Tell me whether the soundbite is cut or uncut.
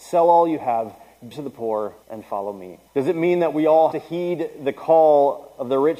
cut